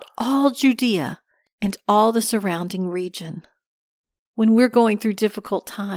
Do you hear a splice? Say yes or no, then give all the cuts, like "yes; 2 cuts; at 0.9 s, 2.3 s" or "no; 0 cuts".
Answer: no; 0 cuts